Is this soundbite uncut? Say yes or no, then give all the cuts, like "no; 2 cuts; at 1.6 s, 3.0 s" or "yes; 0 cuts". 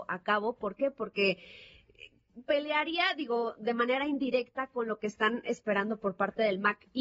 yes; 0 cuts